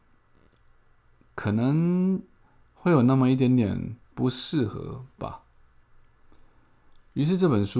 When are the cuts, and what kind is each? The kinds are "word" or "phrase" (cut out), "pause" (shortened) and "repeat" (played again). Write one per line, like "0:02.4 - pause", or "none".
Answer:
0:04.0 - pause